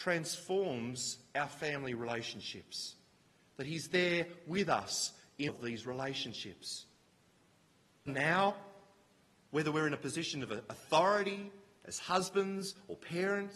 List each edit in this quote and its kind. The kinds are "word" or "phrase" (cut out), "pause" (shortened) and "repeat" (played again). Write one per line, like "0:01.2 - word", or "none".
0:05.5 - word
0:08.1 - word